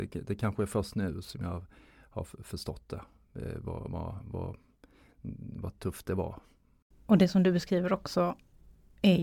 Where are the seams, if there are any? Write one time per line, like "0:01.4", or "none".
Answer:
none